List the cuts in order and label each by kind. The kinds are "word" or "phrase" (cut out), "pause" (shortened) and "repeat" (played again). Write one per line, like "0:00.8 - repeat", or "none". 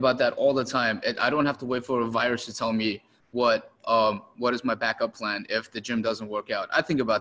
none